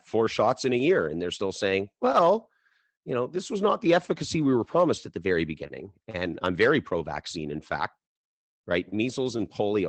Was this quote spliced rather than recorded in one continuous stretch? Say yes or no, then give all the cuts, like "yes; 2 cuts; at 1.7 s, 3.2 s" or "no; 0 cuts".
no; 0 cuts